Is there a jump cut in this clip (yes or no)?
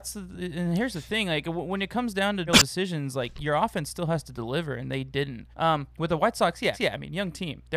yes